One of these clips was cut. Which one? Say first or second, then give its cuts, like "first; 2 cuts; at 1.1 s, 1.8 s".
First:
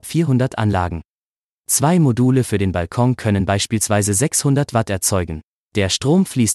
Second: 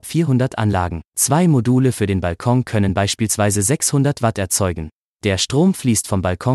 second; 1 cut; at 1.1 s